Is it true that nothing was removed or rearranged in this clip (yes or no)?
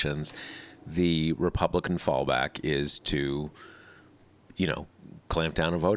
yes